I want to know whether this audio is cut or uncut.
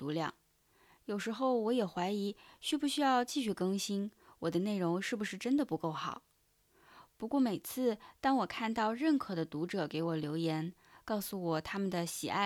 uncut